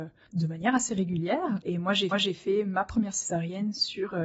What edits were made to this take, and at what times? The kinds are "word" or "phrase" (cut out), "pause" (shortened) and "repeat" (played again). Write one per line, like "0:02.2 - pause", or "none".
0:02.1 - repeat